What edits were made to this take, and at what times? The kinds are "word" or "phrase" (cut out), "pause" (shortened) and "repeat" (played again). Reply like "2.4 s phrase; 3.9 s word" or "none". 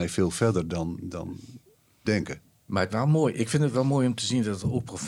2.0 s phrase; 2.9 s word